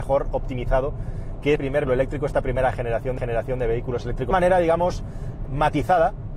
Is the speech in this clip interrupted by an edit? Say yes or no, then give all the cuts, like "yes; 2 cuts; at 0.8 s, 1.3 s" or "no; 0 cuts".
yes; 5 cuts; at 1.6 s, 1.9 s, 3.2 s, 4.3 s, 5.5 s